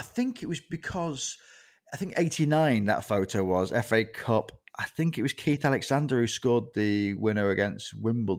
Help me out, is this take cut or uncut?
uncut